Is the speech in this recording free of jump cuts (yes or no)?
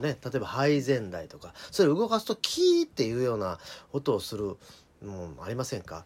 yes